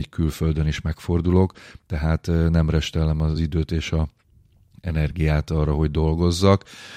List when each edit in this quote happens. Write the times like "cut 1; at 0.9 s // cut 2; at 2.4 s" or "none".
none